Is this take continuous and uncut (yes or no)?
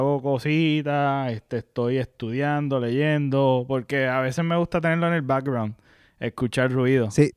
yes